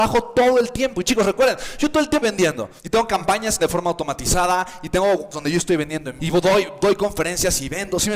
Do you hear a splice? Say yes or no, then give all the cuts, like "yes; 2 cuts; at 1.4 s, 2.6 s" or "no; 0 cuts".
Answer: yes; 5 cuts; at 2.2 s, 2.8 s, 3.6 s, 5.3 s, 6.2 s